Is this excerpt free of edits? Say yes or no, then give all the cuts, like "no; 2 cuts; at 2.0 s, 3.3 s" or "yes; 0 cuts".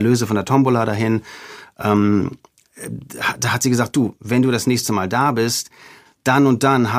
yes; 0 cuts